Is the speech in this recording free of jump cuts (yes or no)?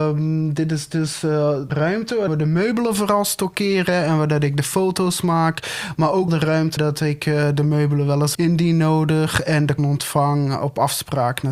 no